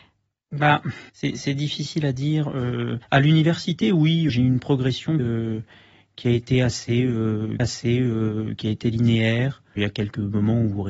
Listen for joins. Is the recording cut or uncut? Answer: cut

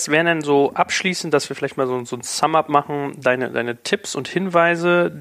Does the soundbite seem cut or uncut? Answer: uncut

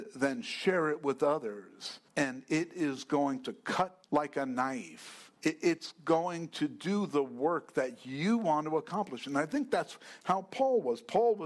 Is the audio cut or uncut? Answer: cut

